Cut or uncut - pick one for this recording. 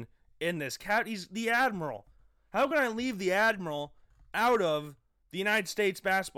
uncut